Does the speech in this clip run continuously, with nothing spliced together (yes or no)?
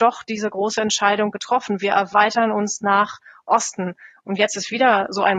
yes